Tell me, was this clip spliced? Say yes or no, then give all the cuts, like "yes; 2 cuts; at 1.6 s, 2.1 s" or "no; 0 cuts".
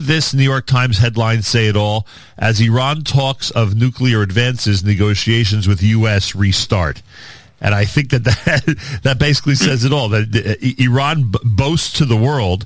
no; 0 cuts